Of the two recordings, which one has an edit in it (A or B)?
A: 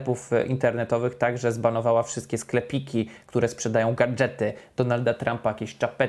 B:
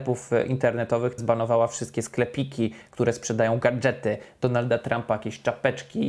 B